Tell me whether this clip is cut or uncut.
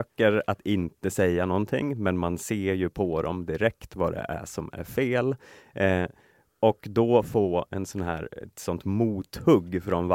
uncut